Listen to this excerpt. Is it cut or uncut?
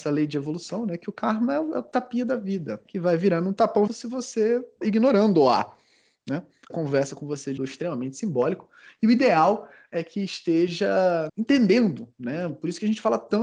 cut